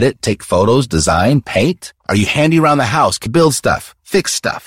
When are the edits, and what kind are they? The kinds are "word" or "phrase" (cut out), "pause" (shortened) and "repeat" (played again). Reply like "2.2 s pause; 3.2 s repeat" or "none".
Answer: 2.0 s pause; 3.3 s word